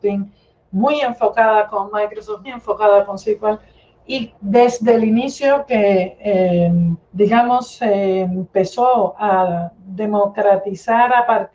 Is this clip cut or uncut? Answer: cut